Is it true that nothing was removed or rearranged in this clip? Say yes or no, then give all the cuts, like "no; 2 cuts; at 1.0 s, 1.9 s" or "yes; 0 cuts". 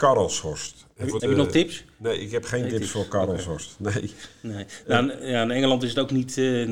no; 1 cut; at 1.2 s